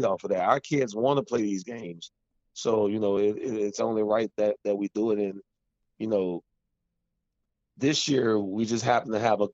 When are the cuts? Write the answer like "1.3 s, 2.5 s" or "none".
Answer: none